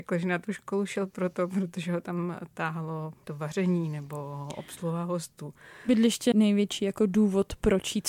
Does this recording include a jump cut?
yes; 2 cuts; at 3.2 s, 6.3 s

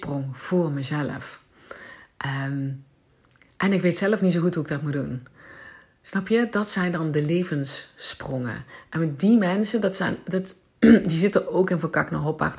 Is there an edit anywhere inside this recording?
no; 0 cuts

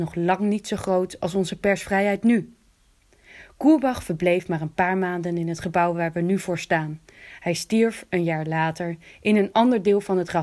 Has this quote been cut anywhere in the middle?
no; 0 cuts

